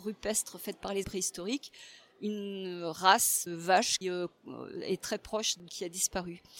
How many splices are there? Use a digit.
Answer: 5